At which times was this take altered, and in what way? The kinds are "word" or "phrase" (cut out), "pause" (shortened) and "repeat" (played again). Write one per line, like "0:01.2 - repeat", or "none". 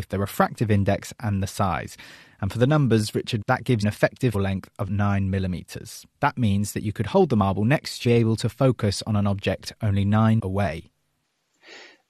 0:03.4 - word
0:03.8 - word
0:04.3 - word
0:06.1 - pause
0:08.0 - phrase
0:10.4 - word